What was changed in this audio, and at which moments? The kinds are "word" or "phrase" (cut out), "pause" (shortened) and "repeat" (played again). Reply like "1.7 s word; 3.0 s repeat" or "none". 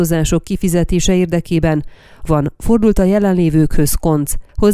2.3 s phrase